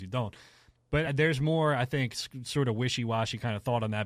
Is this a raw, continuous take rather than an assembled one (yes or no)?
no